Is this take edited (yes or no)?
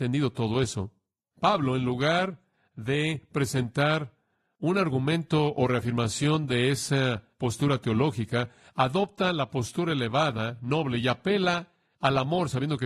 no